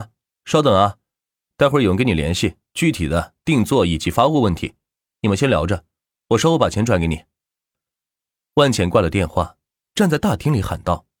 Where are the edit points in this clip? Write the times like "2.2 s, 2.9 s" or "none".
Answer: none

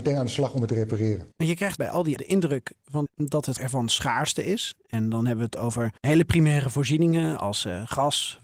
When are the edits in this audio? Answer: 1.3 s, 1.8 s, 2.2 s, 3.1 s, 3.6 s, 6.0 s

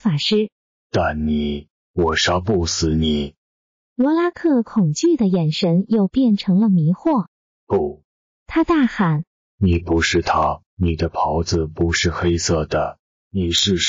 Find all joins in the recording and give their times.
10.7 s

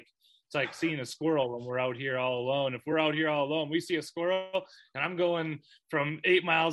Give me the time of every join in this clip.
none

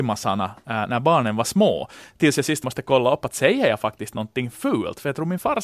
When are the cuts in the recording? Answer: 2.6 s

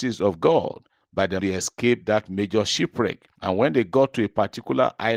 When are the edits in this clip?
1.4 s, 3.4 s

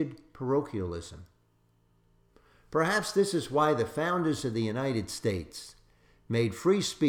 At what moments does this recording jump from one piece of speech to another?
none

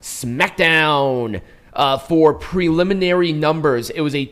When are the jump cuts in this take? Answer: none

